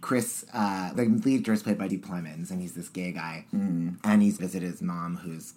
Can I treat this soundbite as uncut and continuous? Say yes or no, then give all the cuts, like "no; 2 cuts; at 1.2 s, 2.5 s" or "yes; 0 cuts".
no; 5 cuts; at 0.9 s, 1.4 s, 1.9 s, 4.0 s, 4.4 s